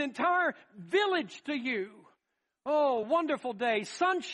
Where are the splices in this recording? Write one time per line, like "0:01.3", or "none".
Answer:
none